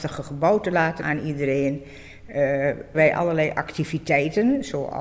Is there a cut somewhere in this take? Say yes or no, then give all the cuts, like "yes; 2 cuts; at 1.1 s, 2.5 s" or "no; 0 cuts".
yes; 2 cuts; at 1.0 s, 2.9 s